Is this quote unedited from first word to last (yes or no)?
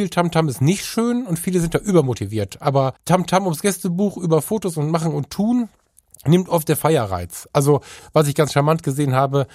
no